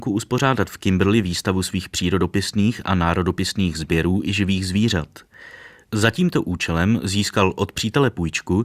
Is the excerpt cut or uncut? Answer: uncut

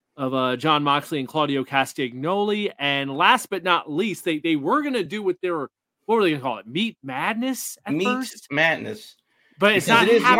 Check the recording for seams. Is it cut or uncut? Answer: uncut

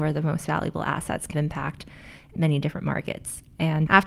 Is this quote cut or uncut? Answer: cut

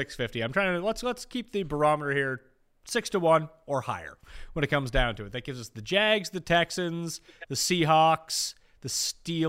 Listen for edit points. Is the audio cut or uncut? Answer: uncut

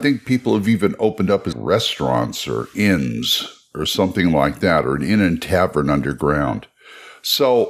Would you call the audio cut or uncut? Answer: cut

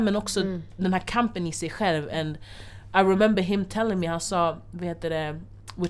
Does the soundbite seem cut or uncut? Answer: uncut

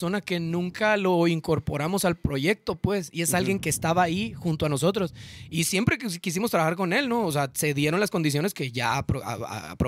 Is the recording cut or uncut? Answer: uncut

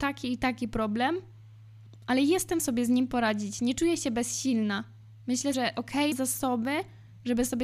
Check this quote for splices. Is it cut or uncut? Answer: cut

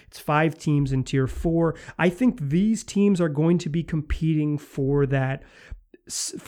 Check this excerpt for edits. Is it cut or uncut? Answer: uncut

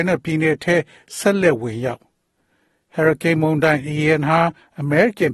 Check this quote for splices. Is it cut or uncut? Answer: uncut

